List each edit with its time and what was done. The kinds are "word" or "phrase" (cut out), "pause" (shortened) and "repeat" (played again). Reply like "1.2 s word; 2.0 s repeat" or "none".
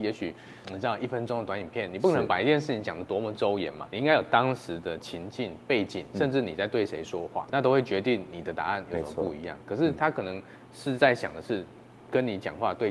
3.9 s word; 7.5 s word